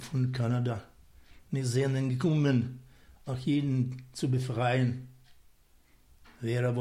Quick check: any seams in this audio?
no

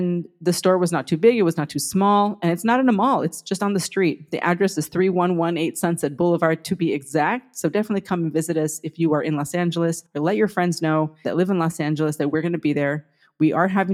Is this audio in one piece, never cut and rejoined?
no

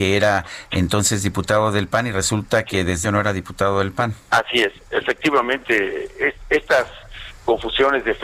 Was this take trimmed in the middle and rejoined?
yes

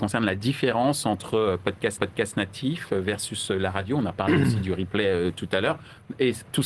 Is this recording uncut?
no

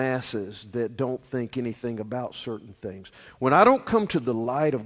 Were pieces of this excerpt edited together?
no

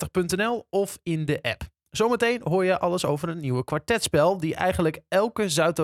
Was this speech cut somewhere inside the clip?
no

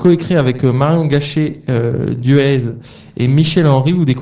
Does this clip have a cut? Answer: no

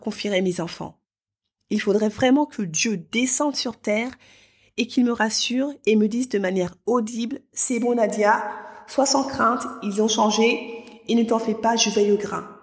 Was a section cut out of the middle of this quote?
no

